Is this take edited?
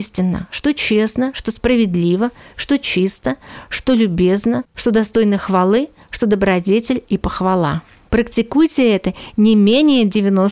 no; 0 cuts

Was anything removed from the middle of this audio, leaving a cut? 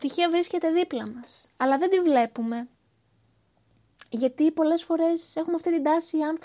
no; 0 cuts

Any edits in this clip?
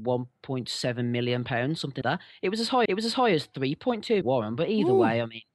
yes; 3 cuts; at 2.0 s, 2.9 s, 4.2 s

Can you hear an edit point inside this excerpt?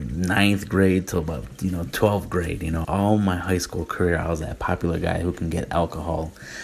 yes; 1 cut; at 2.8 s

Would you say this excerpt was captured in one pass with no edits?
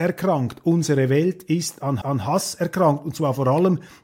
no; 1 cut; at 2.0 s

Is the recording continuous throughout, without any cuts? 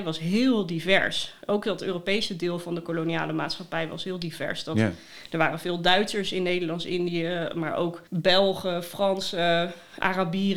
no; 1 cut; at 8.1 s

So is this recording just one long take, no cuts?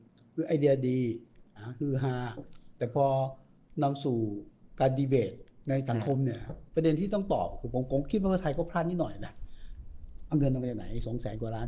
no; 1 cut; at 4.7 s

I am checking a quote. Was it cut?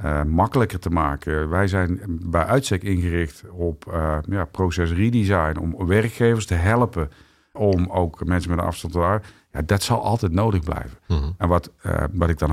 no; 0 cuts

